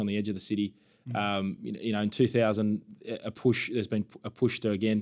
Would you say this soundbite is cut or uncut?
uncut